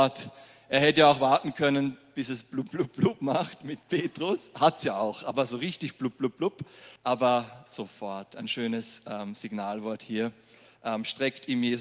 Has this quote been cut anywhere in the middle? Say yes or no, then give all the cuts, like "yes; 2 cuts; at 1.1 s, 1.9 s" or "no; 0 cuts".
yes; 1 cut; at 7.0 s